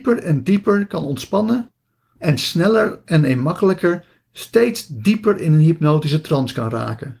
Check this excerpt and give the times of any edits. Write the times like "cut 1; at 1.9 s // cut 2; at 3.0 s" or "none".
none

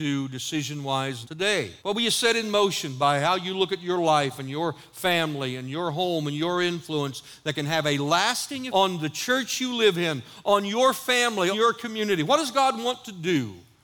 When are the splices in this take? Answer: cut 1; at 1.2 s // cut 2; at 1.8 s // cut 3; at 8.7 s // cut 4; at 11.5 s

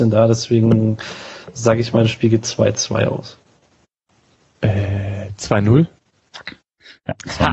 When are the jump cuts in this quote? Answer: none

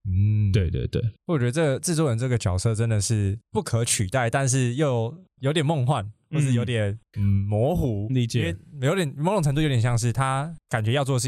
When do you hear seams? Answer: cut 1; at 8.1 s

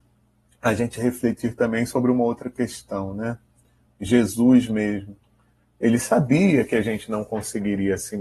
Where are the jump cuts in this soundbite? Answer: none

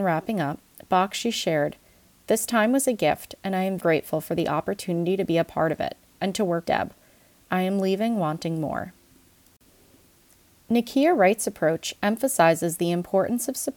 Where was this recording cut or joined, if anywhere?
cut 1; at 3.8 s // cut 2; at 6.6 s

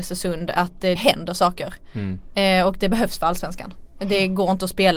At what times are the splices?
cut 1; at 1.0 s

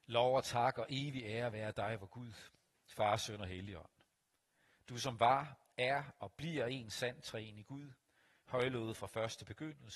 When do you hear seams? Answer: none

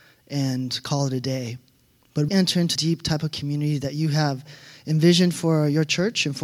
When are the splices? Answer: cut 1; at 2.3 s // cut 2; at 2.8 s

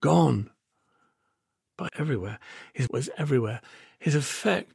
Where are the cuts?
cut 1; at 1.9 s // cut 2; at 2.9 s

